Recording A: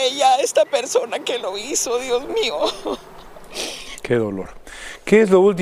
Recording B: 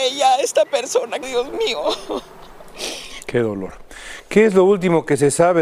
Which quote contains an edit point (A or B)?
B